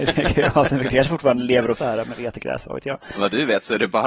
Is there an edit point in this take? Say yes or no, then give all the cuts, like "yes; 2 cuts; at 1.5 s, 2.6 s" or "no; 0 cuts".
yes; 1 cut; at 1.8 s